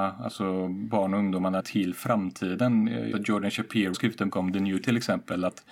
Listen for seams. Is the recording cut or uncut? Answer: cut